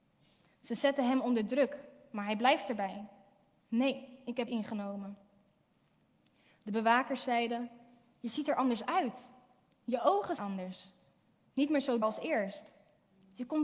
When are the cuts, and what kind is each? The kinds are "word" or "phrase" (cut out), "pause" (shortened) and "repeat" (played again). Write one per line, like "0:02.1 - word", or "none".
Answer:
0:04.5 - word
0:10.4 - word
0:12.0 - word